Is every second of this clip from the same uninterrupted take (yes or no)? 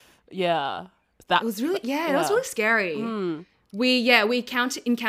yes